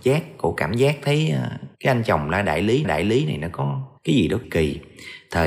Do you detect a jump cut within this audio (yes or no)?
yes